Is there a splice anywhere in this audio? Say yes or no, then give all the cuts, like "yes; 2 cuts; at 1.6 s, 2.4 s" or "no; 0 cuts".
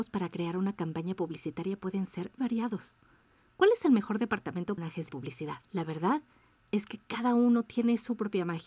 yes; 4 cuts; at 2.4 s, 4.8 s, 5.1 s, 5.6 s